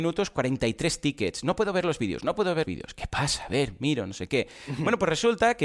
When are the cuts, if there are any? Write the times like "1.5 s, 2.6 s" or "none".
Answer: 2.6 s